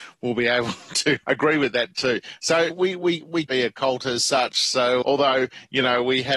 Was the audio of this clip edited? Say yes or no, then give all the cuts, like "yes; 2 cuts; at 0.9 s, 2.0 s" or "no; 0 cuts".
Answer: yes; 4 cuts; at 1.2 s, 2.7 s, 3.5 s, 5.0 s